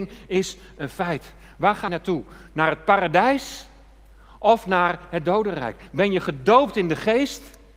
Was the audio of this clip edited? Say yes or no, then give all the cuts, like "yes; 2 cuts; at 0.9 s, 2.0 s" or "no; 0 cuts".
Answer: yes; 1 cut; at 1.9 s